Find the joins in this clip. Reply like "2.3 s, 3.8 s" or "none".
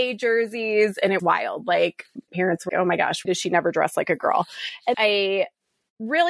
1.2 s, 2.3 s, 2.7 s, 3.2 s, 4.9 s